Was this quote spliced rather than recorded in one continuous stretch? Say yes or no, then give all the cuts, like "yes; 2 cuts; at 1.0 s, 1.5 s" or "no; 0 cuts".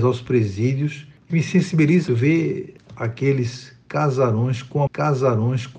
yes; 3 cuts; at 1.3 s, 2.1 s, 4.9 s